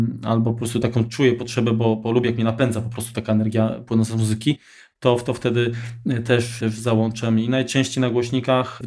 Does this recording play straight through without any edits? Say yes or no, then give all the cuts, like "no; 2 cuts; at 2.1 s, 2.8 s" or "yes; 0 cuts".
yes; 0 cuts